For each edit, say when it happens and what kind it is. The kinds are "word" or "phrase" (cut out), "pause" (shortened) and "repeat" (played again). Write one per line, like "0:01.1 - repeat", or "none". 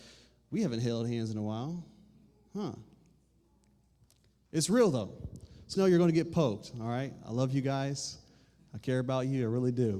0:05.8 - word

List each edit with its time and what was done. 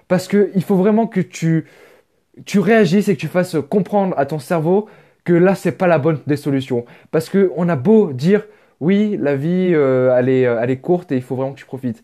none

